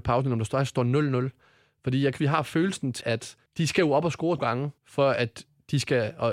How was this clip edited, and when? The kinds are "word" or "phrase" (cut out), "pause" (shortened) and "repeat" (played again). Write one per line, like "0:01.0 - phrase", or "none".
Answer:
0:02.2 - word
0:03.0 - word
0:03.5 - pause
0:04.4 - word
0:04.8 - pause